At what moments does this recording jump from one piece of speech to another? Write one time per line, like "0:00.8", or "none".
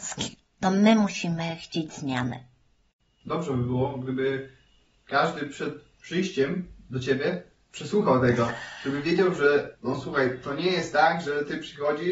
none